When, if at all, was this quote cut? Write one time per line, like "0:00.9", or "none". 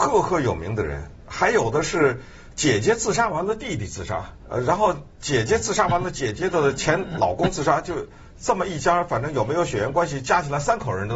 0:04.4